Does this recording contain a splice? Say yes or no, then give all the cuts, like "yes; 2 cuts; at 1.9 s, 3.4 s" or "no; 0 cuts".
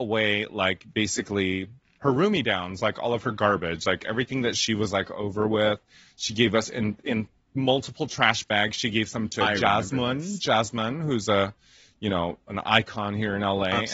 no; 0 cuts